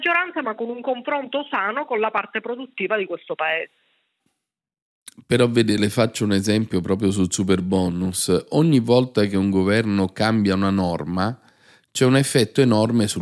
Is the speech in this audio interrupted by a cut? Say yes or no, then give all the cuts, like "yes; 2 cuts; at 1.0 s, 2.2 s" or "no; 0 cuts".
no; 0 cuts